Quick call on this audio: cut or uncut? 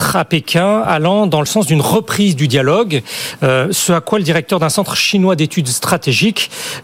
uncut